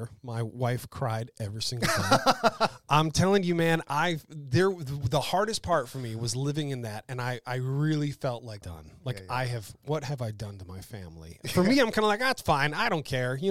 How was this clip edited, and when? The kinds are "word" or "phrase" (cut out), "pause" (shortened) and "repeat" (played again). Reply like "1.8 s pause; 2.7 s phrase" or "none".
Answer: 8.6 s phrase